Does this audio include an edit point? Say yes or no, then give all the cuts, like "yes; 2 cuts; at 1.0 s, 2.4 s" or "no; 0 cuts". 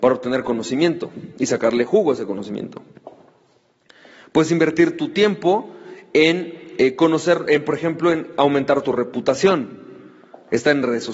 no; 0 cuts